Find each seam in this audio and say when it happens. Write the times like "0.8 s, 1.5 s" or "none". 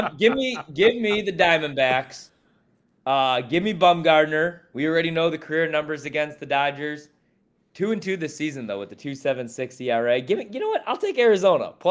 none

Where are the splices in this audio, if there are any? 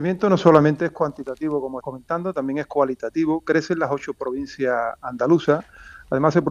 1.8 s

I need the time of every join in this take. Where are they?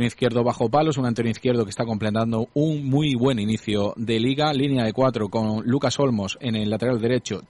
none

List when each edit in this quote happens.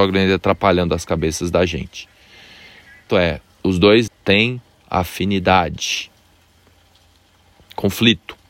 3.1 s, 4.1 s

